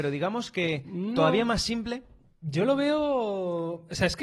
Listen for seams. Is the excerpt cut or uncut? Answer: uncut